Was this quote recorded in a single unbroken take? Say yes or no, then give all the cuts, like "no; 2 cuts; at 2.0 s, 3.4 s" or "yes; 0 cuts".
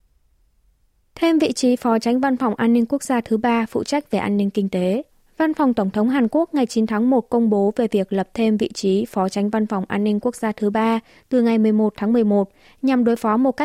no; 1 cut; at 5.1 s